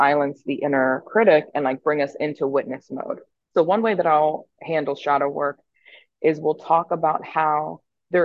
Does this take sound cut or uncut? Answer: cut